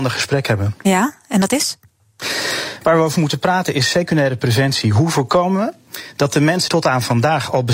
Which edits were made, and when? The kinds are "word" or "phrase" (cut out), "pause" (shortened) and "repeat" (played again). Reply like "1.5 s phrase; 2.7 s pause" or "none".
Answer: 6.7 s word